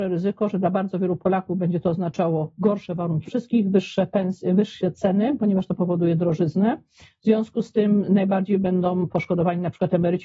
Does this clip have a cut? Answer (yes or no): yes